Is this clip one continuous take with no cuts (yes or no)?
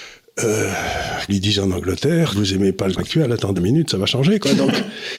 no